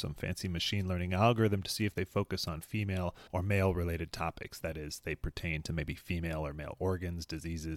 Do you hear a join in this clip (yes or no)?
yes